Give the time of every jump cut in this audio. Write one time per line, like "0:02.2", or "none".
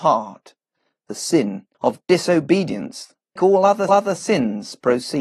0:01.7
0:03.4
0:03.9